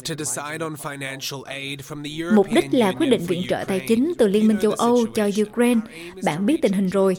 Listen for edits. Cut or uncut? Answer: uncut